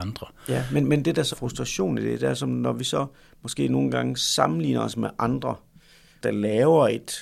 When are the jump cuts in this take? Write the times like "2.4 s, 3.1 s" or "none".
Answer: 1.3 s, 6.2 s